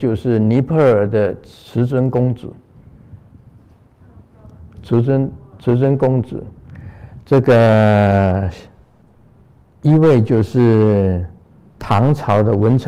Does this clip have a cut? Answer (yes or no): no